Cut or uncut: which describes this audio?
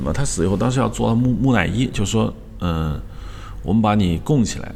uncut